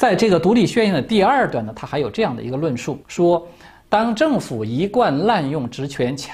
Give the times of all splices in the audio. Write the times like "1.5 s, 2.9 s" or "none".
3.0 s